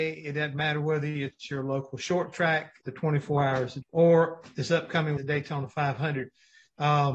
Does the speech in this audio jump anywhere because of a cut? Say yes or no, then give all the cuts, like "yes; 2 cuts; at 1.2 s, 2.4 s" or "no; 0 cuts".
yes; 3 cuts; at 2.8 s, 3.8 s, 5.2 s